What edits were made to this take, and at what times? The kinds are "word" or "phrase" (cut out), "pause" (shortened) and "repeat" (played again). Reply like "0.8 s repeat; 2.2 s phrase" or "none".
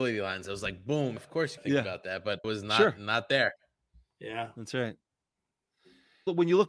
1.2 s word; 1.6 s word; 2.4 s word